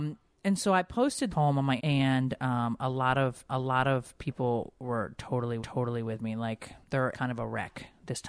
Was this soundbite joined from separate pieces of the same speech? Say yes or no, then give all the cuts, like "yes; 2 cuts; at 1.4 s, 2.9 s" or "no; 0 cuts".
yes; 5 cuts; at 1.3 s, 1.8 s, 3.5 s, 5.6 s, 7.1 s